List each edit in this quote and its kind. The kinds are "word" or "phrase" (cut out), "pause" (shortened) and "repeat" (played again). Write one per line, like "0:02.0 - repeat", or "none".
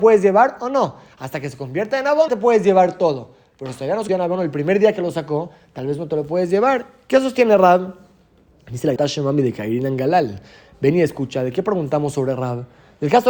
0:02.3 - word
0:04.1 - word
0:09.0 - word